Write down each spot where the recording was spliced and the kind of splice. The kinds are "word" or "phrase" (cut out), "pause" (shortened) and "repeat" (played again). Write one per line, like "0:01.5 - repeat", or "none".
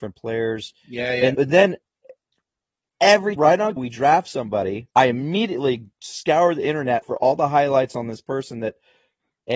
0:01.3 - word
0:03.4 - word
0:03.8 - word
0:04.9 - pause
0:05.9 - pause
0:07.0 - word